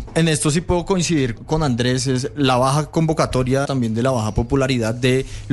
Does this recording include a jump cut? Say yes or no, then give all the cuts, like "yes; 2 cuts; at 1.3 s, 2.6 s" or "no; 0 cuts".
yes; 2 cuts; at 1.4 s, 3.6 s